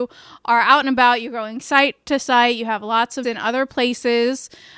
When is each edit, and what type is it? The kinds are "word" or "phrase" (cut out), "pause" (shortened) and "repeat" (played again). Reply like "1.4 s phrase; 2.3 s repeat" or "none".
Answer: 3.2 s word